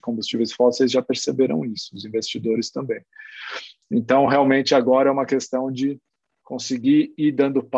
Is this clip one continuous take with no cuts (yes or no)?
yes